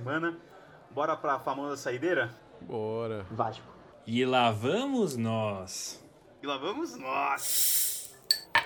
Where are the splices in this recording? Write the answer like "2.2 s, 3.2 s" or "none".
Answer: none